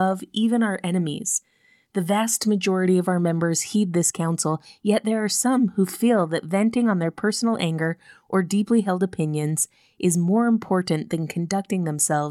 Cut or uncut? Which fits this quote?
uncut